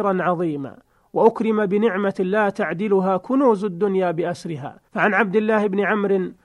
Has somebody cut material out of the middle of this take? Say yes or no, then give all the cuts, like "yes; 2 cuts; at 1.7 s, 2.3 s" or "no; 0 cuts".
yes; 1 cut; at 4.9 s